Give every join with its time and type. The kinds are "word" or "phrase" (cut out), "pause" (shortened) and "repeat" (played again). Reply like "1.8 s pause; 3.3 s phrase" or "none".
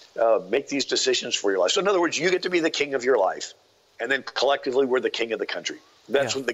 none